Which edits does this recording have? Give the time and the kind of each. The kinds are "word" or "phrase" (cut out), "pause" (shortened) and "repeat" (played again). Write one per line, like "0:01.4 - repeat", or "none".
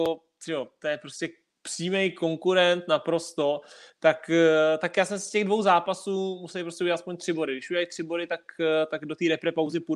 none